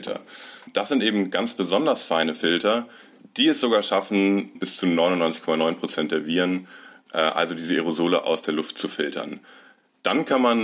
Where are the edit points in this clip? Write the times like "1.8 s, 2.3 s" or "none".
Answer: none